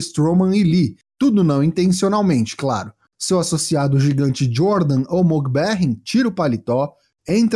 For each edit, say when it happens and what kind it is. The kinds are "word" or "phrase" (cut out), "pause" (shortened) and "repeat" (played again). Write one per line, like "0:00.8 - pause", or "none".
none